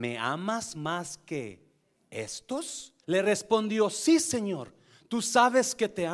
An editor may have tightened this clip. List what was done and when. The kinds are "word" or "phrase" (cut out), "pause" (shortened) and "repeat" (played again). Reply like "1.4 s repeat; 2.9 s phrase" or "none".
3.0 s pause